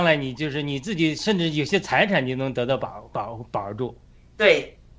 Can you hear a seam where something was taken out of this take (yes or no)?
no